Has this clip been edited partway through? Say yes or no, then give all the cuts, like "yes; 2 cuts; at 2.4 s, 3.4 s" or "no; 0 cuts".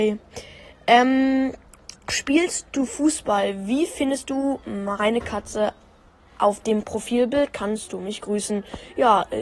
no; 0 cuts